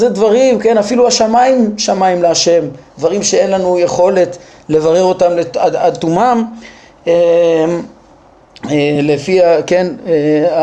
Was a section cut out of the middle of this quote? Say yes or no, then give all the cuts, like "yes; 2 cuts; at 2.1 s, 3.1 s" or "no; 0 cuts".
no; 0 cuts